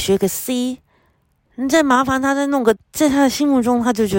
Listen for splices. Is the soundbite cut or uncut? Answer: cut